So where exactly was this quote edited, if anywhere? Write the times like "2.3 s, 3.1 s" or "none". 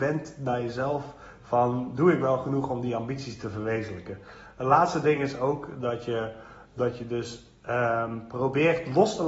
none